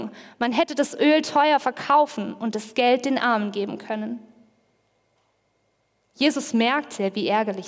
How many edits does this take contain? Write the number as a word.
zero